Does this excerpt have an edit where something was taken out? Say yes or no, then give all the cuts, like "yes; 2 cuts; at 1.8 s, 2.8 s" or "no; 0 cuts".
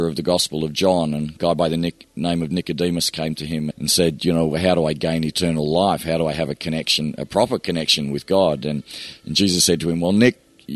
yes; 1 cut; at 3.7 s